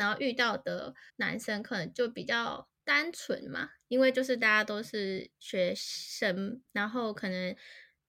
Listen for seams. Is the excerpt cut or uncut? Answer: cut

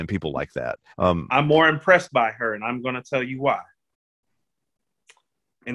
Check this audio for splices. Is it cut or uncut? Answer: cut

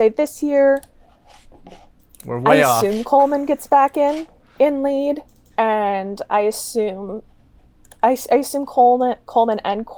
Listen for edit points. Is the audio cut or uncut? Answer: uncut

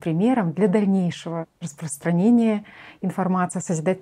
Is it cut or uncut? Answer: uncut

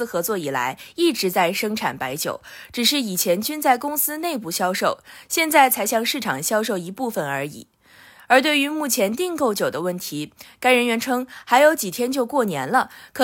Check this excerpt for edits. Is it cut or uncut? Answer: uncut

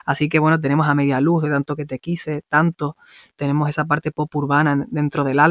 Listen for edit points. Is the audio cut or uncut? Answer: uncut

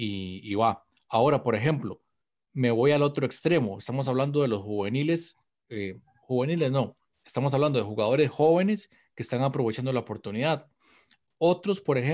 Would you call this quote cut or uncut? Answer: uncut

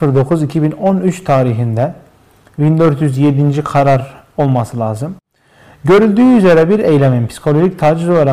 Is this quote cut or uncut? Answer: uncut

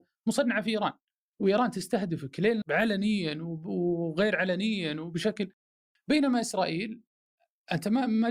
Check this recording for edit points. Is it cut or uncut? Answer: cut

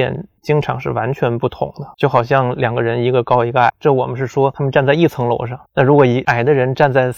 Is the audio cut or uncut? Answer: cut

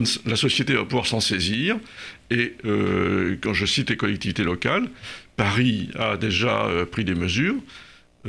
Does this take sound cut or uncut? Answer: uncut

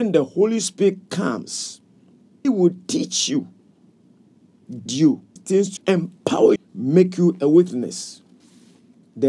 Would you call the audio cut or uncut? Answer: cut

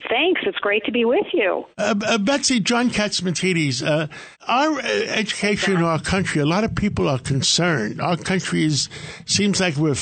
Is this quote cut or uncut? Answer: cut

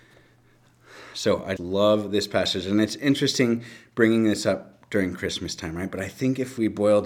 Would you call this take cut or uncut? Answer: cut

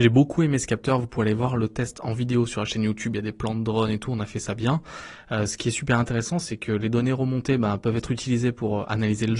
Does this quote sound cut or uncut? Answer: uncut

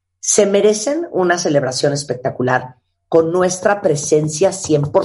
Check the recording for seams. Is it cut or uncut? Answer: uncut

